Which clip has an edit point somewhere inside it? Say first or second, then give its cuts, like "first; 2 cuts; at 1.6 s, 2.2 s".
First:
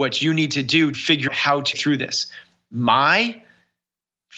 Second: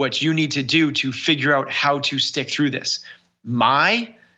first; 3 cuts; at 0.9 s, 1.3 s, 1.7 s